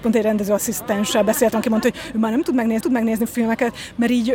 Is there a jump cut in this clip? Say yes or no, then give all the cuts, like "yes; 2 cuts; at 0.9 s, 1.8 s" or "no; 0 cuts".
yes; 1 cut; at 2.8 s